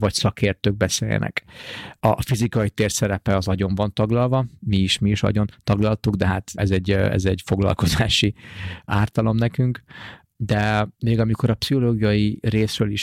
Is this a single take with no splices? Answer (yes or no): no